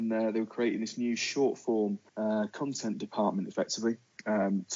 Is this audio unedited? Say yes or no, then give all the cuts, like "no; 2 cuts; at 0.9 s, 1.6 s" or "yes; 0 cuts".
no; 1 cut; at 2.1 s